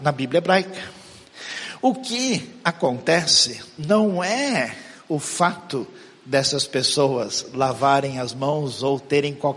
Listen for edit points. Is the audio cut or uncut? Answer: uncut